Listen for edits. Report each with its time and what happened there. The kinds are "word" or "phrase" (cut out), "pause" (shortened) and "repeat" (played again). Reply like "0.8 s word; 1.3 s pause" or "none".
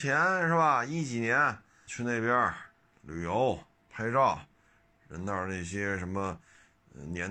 1.9 s word; 3.9 s word

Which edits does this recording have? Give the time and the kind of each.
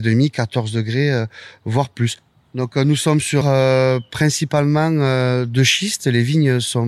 3.4 s phrase

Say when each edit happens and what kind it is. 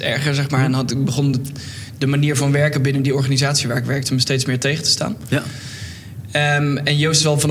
none

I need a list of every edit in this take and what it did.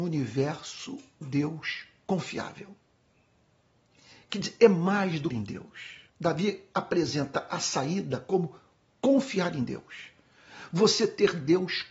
1.2 s word; 5.3 s phrase; 6.1 s pause

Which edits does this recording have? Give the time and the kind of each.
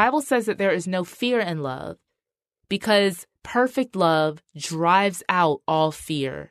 3.4 s pause

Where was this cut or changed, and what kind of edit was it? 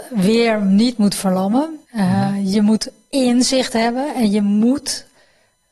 1.8 s pause

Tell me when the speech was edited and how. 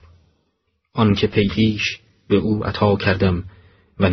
1.5 s phrase

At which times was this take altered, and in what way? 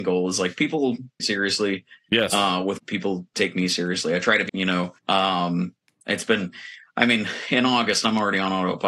1.2 s phrase; 2.8 s phrase; 4.5 s word; 5.0 s pause

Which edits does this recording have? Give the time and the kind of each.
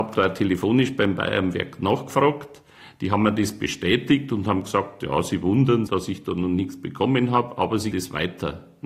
5.9 s word; 7.9 s word

